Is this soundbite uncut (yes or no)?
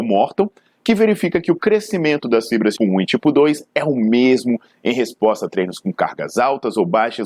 no